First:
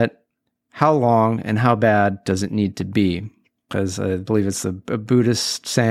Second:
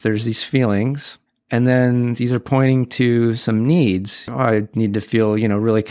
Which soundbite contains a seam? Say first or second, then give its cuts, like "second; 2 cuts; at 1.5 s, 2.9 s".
second; 1 cut; at 1.3 s